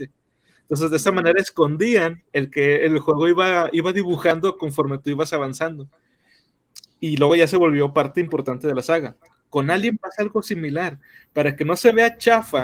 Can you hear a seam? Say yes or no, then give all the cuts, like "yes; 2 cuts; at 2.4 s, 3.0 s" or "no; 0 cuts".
no; 0 cuts